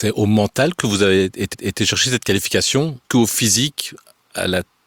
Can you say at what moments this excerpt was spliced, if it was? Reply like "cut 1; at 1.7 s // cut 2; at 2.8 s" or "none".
cut 1; at 1.5 s // cut 2; at 3.0 s